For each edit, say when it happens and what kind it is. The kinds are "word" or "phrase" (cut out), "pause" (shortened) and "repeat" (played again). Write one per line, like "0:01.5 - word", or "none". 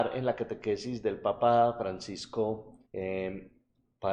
0:02.9 - pause